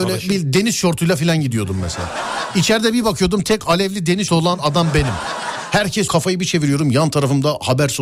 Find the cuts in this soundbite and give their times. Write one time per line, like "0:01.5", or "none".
0:04.3
0:06.1